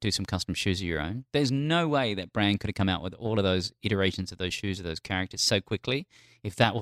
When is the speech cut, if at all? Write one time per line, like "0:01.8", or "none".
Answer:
none